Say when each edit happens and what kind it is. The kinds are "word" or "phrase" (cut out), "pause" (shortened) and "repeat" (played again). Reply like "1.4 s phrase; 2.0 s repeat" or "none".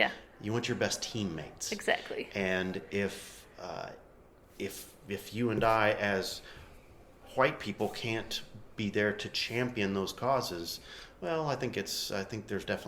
none